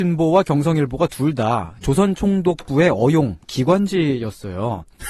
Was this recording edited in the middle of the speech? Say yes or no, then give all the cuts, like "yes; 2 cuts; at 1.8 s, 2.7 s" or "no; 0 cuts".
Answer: no; 0 cuts